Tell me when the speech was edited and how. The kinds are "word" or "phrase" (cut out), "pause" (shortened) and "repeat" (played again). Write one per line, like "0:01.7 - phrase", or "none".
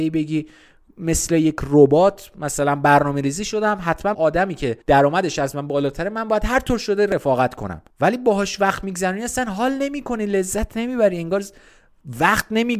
0:04.1 - word
0:04.8 - pause
0:07.9 - pause